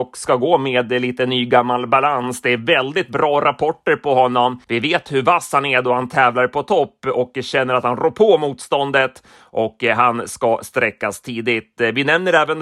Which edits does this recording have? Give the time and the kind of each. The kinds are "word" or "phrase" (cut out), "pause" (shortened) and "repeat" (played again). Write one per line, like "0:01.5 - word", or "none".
0:04.6 - pause